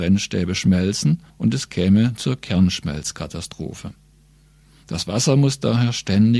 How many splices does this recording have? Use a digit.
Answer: 1